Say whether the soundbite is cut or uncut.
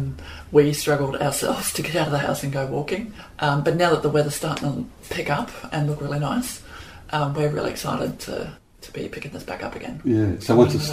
cut